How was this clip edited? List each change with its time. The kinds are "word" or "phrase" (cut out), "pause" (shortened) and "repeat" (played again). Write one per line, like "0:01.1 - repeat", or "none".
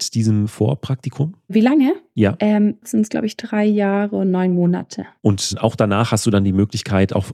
0:02.8 - word

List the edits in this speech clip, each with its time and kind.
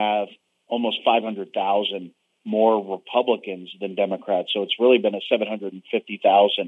none

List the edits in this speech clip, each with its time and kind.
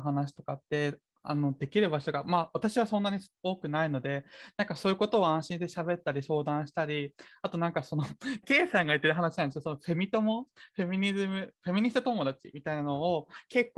0:08.4 - word

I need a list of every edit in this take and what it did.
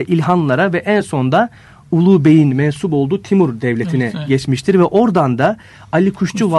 none

